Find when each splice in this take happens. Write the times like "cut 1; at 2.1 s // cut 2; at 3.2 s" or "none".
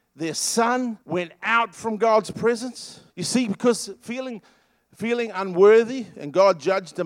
cut 1; at 1.0 s // cut 2; at 3.1 s

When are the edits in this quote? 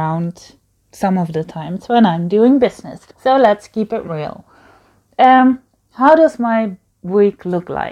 cut 1; at 3.1 s

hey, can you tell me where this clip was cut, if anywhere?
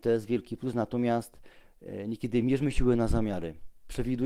none

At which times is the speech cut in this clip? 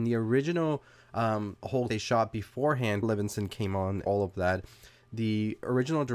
cut 1; at 1.9 s // cut 2; at 3.0 s // cut 3; at 4.1 s

